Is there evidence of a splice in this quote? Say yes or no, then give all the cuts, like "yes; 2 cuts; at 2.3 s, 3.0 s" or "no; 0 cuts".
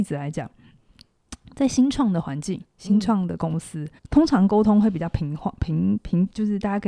yes; 1 cut; at 4.0 s